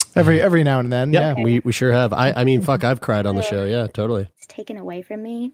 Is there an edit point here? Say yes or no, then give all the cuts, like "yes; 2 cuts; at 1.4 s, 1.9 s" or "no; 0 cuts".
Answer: yes; 1 cut; at 4.3 s